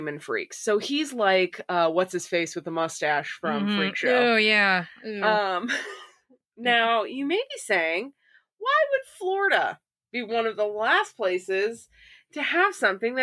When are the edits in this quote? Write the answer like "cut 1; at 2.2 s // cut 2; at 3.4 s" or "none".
none